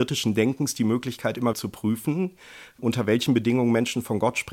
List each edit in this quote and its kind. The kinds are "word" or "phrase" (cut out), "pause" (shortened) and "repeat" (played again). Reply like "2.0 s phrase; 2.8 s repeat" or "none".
1.5 s word; 2.8 s word